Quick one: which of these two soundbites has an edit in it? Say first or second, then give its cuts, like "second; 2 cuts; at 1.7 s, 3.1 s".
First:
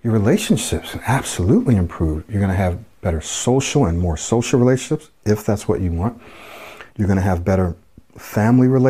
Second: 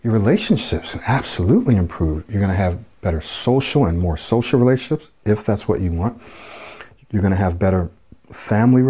first; 1 cut; at 6.9 s